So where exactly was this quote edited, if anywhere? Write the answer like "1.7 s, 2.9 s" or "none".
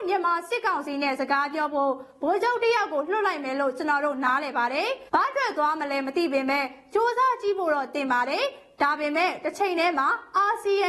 5.1 s